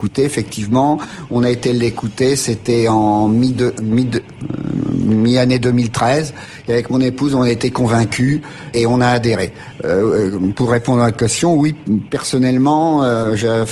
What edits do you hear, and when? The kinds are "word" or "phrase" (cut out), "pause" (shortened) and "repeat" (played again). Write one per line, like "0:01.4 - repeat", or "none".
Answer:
0:08.7 - word